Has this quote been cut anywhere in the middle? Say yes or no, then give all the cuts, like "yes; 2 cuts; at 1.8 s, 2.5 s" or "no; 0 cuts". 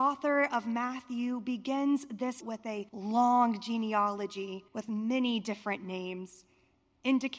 yes; 3 cuts; at 2.4 s, 2.9 s, 4.7 s